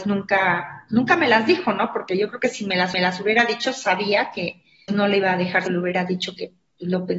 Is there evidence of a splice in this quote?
yes; 3 cuts; at 2.9 s, 4.9 s, 5.7 s

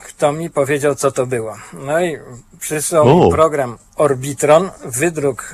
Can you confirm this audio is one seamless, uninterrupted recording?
yes; 0 cuts

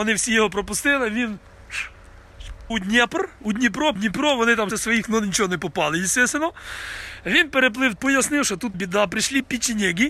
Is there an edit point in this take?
yes; 6 cuts; at 2.7 s, 4.0 s, 4.7 s, 5.0 s, 8.0 s, 8.7 s

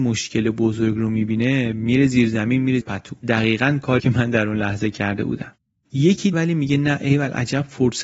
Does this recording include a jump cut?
yes; 4 cuts; at 2.8 s, 3.2 s, 4.0 s, 6.3 s

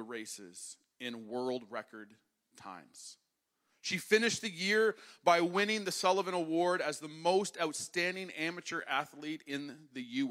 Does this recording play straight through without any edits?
no; 1 cut; at 3.3 s

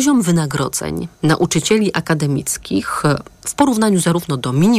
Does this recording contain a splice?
yes; 1 cut; at 1.1 s

